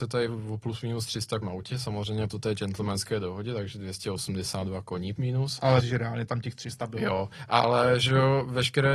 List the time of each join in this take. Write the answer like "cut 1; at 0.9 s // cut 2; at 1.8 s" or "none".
cut 1; at 1.4 s // cut 2; at 2.3 s // cut 3; at 5.2 s // cut 4; at 5.8 s